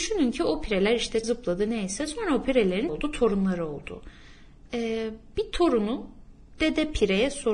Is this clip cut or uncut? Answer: cut